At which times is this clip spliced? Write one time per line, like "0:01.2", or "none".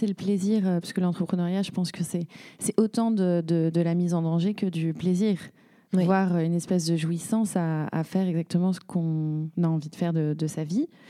none